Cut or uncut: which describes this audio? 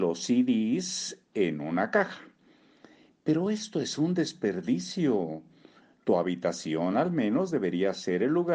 uncut